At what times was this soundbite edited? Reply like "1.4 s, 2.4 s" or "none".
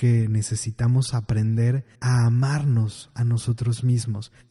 1.9 s